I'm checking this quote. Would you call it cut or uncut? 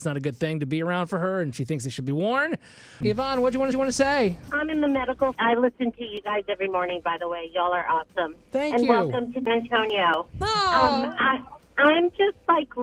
cut